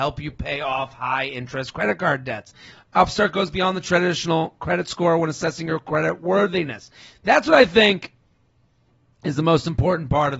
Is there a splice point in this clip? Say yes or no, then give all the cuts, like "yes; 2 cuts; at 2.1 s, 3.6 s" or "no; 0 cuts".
no; 0 cuts